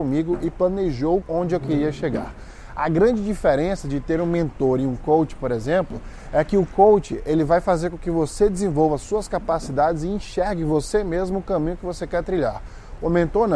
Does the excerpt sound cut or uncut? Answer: cut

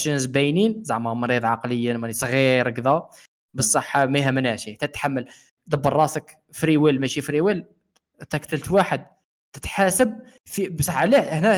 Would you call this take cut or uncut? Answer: uncut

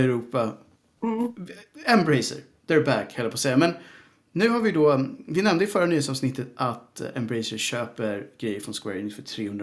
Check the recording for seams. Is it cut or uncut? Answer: uncut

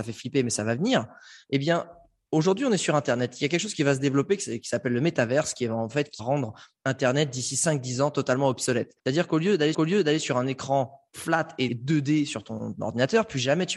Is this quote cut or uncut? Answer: cut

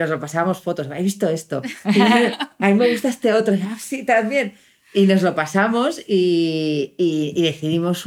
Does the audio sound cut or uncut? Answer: uncut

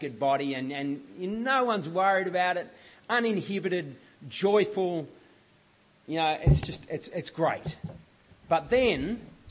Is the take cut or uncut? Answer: uncut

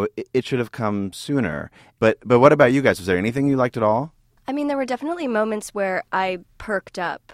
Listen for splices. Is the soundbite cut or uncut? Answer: uncut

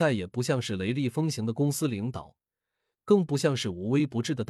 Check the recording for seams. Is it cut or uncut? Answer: uncut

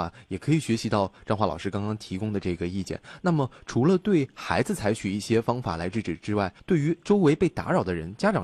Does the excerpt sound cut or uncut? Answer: cut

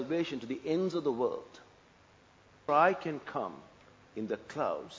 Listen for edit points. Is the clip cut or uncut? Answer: cut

